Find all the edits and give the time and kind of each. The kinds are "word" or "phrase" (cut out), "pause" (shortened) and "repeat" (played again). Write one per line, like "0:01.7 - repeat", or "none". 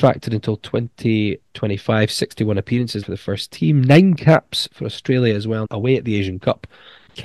0:03.0 - word
0:05.6 - word